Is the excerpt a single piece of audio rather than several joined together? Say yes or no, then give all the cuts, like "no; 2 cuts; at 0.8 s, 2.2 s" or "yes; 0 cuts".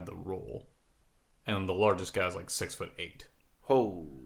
yes; 0 cuts